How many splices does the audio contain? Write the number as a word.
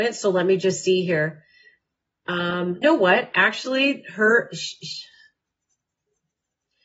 one